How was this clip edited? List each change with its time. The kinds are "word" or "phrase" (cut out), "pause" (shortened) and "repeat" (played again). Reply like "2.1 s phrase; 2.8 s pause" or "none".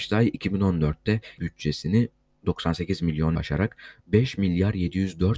1.4 s word; 3.3 s word